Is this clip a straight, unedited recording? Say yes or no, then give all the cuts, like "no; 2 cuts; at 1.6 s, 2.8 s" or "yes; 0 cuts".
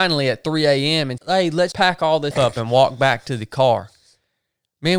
no; 3 cuts; at 1.2 s, 1.7 s, 2.3 s